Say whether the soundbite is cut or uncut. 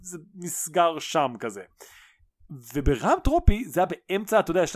uncut